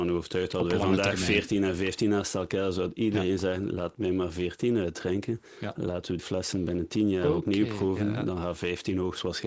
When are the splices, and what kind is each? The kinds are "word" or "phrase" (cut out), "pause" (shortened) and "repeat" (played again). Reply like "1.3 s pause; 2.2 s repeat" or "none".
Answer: 6.2 s phrase